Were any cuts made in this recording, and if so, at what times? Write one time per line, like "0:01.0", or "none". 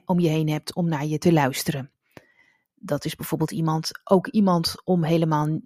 none